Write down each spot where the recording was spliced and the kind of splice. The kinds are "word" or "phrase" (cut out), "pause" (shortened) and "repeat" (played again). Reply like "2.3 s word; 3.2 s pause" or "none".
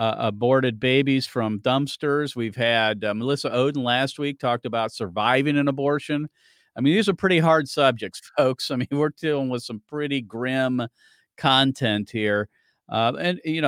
none